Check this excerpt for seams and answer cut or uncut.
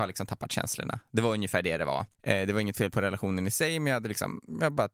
cut